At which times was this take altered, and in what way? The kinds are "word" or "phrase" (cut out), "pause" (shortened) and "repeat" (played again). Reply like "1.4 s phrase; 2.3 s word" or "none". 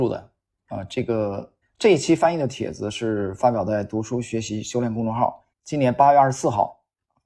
1.6 s pause; 5.5 s pause